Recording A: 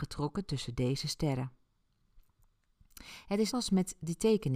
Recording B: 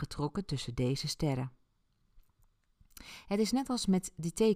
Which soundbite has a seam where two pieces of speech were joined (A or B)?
A